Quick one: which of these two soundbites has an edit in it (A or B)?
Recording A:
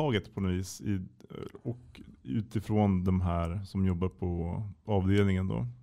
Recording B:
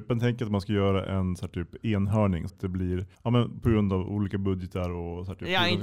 B